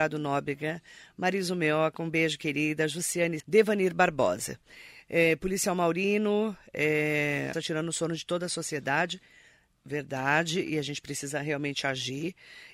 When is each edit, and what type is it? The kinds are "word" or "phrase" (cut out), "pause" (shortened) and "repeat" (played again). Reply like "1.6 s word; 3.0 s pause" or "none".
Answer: 3.4 s word; 7.5 s phrase